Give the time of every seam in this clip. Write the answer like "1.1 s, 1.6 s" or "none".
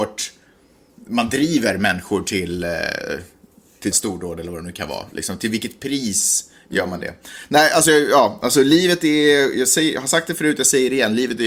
3.9 s